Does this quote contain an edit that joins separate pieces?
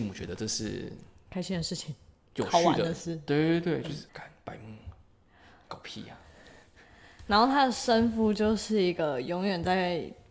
yes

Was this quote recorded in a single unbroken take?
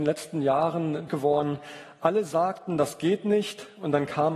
no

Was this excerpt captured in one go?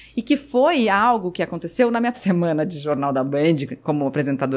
no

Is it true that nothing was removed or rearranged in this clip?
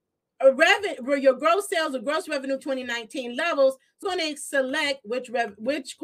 no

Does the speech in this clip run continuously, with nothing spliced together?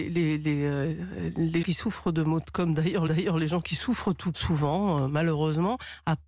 no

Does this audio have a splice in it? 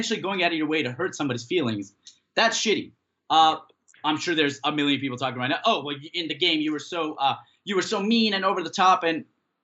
no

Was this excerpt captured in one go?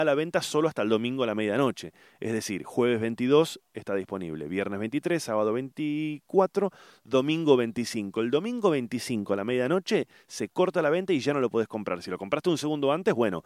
yes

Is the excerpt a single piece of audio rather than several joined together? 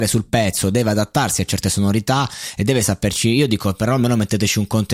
yes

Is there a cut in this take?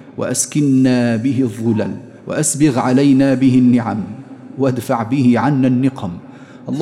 yes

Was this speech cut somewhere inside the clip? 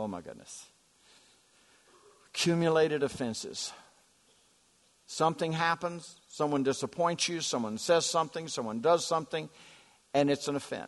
no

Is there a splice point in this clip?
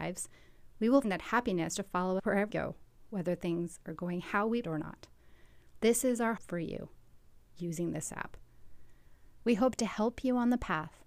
yes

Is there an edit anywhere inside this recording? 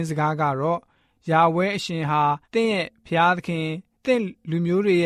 yes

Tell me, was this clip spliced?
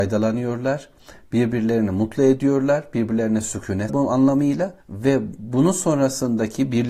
yes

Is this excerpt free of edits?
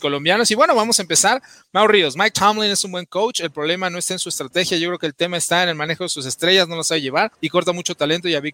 no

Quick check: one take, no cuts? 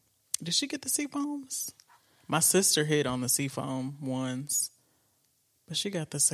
yes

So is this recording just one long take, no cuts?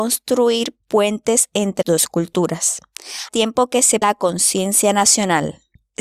no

